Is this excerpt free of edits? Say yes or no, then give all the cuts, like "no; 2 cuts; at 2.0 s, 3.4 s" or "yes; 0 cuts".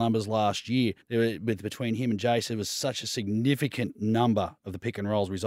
no; 1 cut; at 1.0 s